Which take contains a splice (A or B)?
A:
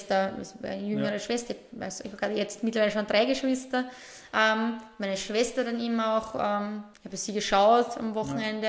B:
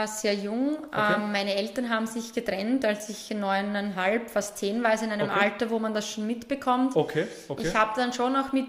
A